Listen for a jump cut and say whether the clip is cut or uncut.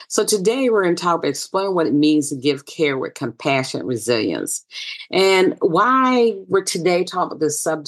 uncut